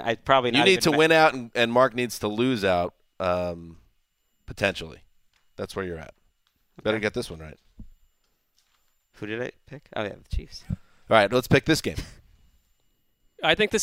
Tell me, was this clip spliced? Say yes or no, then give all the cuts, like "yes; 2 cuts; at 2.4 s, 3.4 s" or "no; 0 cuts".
no; 0 cuts